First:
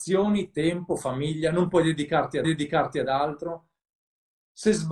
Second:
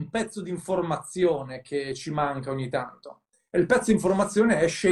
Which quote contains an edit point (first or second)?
first